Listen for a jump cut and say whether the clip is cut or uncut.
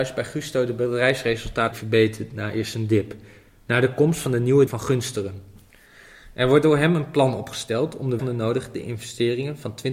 cut